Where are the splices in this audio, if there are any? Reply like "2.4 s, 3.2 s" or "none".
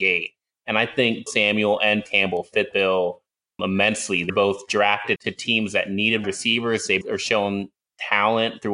1.3 s, 2.1 s, 2.7 s, 3.6 s, 4.3 s, 5.2 s, 6.2 s, 7.0 s